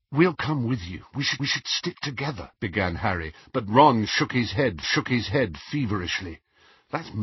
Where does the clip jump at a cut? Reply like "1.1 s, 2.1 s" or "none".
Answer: 1.4 s, 2.5 s, 4.8 s